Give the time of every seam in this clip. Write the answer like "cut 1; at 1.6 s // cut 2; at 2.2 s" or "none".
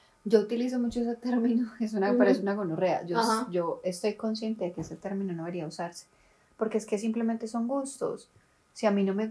none